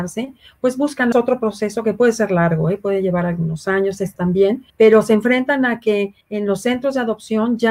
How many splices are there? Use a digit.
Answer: 4